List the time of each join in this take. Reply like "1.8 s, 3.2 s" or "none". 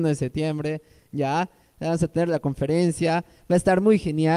none